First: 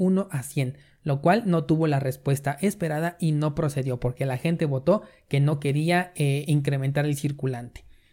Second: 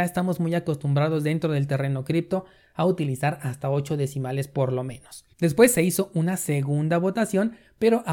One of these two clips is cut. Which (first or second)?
second